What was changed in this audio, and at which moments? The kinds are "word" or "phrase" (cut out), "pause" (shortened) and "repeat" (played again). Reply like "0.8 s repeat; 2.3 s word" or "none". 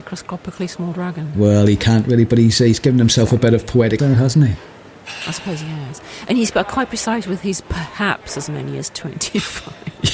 4.0 s word